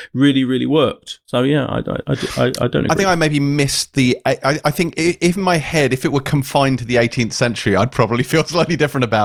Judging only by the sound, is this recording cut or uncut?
cut